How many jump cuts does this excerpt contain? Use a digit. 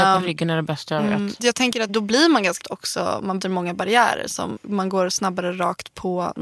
5